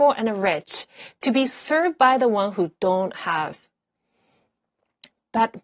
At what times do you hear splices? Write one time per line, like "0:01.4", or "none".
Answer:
none